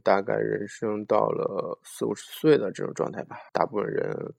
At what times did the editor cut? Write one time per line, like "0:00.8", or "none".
0:03.5

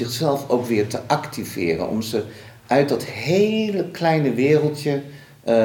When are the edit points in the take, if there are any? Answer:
none

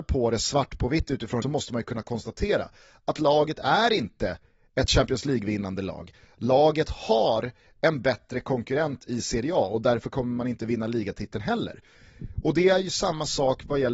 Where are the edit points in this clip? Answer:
0:01.4

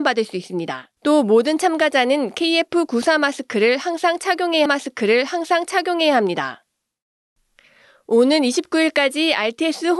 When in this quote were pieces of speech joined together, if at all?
0:01.0
0:04.7

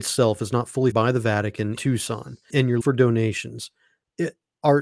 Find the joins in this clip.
0:00.9
0:01.8
0:02.5
0:02.8

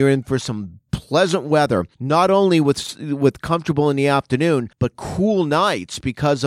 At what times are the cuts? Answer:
0:01.9
0:04.7

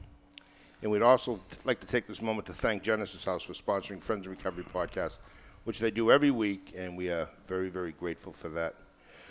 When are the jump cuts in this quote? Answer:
none

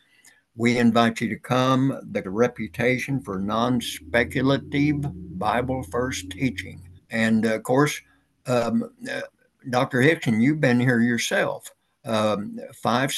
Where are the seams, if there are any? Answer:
0:02.2
0:07.0

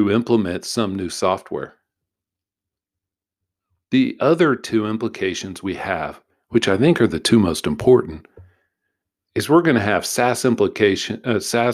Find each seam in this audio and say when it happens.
none

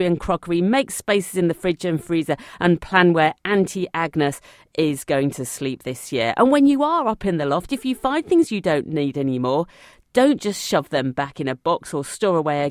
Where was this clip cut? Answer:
none

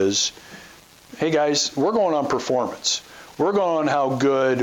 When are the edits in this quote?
none

